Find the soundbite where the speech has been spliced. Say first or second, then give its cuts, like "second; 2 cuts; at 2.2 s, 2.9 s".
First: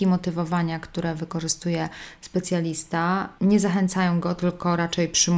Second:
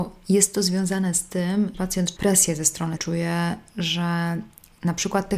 second; 3 cuts; at 1.7 s, 2.2 s, 3.0 s